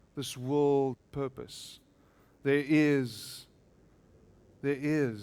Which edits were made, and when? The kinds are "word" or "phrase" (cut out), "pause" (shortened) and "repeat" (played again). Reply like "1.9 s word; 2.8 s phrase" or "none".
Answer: 0.9 s word